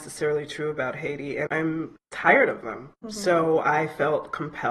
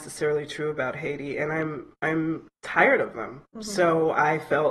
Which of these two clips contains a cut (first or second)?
first